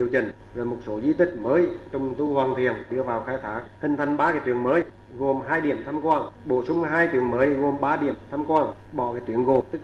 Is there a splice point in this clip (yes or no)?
no